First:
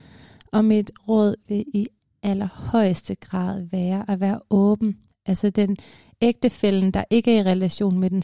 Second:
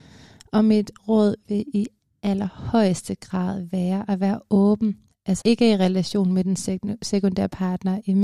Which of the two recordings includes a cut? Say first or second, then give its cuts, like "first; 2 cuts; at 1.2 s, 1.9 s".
second; 1 cut; at 5.4 s